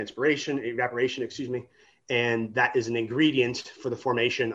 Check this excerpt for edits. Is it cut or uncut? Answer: uncut